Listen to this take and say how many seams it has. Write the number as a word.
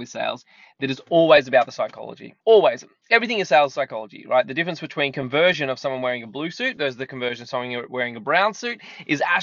one